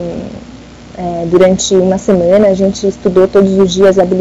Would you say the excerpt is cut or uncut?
uncut